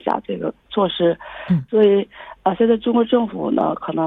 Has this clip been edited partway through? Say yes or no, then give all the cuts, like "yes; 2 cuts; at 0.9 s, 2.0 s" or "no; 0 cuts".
no; 0 cuts